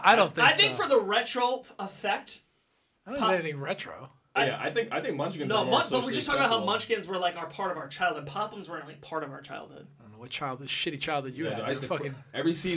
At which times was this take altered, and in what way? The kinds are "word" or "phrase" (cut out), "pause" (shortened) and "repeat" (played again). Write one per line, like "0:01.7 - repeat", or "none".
none